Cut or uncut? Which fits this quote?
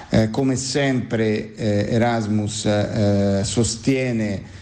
uncut